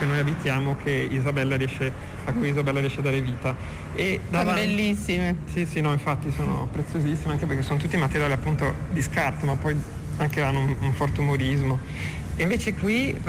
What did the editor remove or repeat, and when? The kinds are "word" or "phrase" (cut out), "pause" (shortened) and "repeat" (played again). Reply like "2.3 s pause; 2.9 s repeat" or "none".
none